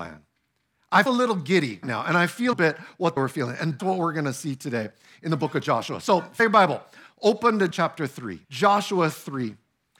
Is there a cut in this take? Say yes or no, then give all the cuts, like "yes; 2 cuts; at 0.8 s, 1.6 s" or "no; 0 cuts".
yes; 8 cuts; at 1.1 s, 1.8 s, 2.5 s, 3.2 s, 3.8 s, 6.4 s, 7.7 s, 8.4 s